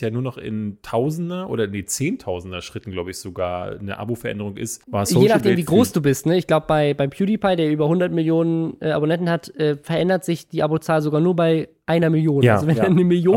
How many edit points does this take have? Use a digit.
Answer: 1